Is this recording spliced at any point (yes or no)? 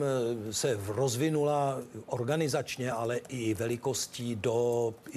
no